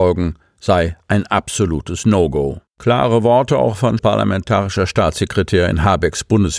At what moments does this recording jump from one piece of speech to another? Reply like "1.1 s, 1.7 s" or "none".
2.7 s, 4.0 s